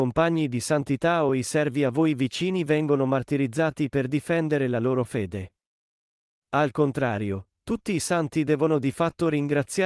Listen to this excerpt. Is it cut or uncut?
uncut